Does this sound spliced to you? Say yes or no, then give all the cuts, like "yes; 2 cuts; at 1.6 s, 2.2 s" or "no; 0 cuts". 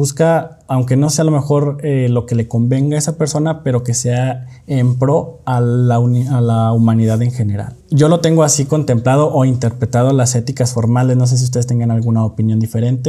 yes; 1 cut; at 7.8 s